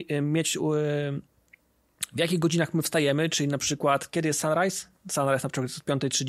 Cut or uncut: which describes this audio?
uncut